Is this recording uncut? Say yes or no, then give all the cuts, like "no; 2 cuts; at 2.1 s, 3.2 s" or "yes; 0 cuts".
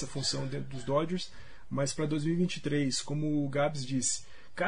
yes; 0 cuts